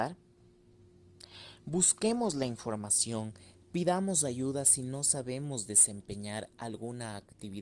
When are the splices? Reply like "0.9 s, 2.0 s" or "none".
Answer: none